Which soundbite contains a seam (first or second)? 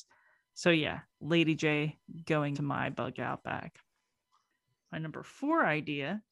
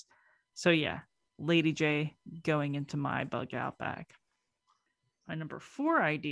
first